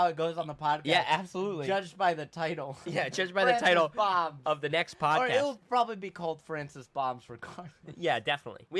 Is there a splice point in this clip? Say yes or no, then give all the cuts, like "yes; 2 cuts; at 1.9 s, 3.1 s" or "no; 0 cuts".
no; 0 cuts